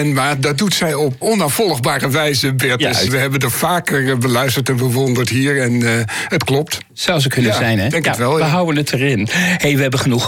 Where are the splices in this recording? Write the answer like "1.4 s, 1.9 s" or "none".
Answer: 1.2 s, 3.1 s